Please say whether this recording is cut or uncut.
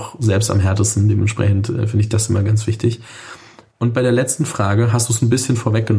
uncut